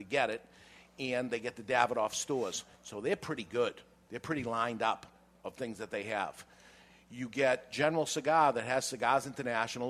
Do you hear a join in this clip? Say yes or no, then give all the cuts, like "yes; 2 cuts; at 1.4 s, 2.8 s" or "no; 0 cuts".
no; 0 cuts